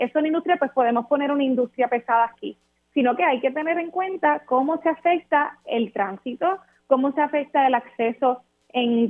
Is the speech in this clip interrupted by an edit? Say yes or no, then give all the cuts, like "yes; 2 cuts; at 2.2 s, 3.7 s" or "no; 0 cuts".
no; 0 cuts